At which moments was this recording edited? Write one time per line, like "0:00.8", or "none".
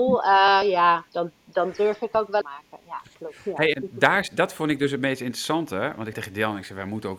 0:01.1
0:02.4
0:03.4
0:03.7
0:06.1